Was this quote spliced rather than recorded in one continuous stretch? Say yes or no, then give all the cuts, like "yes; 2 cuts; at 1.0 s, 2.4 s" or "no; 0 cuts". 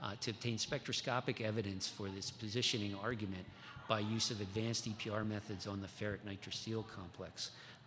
no; 0 cuts